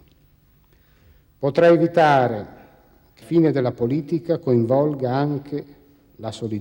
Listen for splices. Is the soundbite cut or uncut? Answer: cut